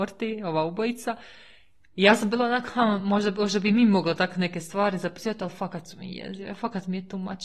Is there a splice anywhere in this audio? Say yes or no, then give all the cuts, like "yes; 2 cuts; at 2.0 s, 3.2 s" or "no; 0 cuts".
no; 0 cuts